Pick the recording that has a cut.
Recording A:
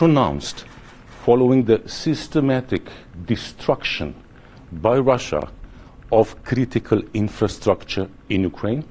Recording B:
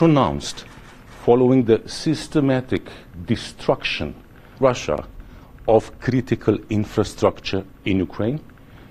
B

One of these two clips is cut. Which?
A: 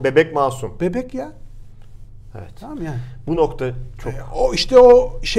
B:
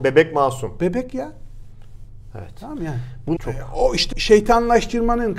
B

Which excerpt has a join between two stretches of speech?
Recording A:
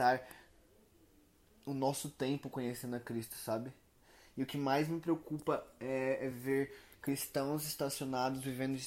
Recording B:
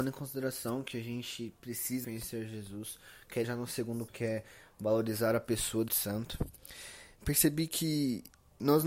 B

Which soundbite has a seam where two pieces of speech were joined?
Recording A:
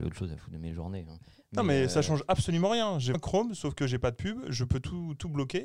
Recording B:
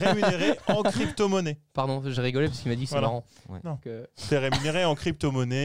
A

